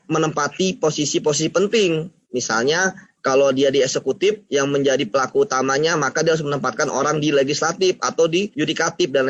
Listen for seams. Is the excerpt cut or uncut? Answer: uncut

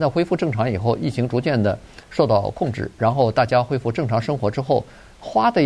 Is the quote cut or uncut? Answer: uncut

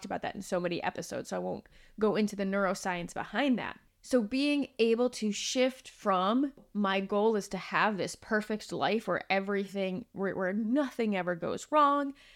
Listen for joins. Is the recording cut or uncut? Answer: uncut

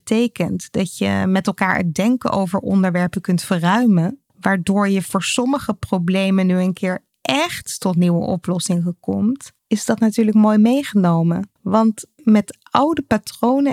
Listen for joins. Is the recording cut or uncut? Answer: cut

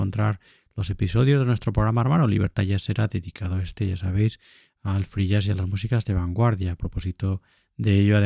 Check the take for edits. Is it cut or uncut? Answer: uncut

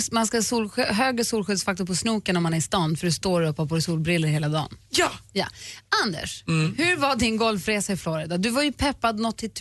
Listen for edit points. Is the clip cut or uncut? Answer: uncut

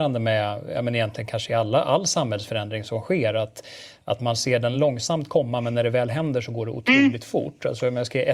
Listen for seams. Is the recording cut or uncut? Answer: uncut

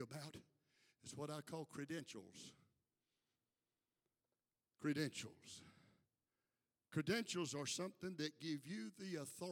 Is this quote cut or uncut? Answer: uncut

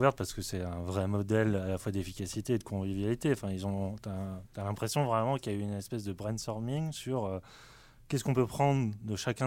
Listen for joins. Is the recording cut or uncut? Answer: uncut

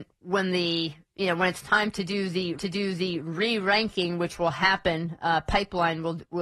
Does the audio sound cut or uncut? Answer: cut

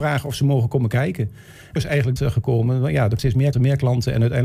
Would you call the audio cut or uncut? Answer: cut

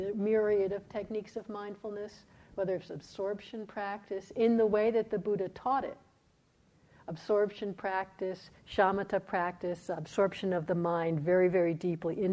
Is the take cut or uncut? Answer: uncut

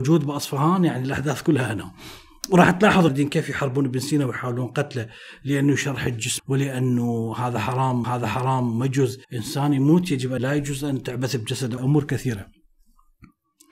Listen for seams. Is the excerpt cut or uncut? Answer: cut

